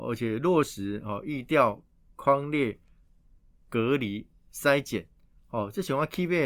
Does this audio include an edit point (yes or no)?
no